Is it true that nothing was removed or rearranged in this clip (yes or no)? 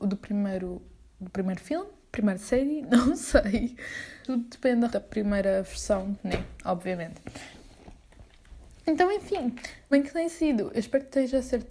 no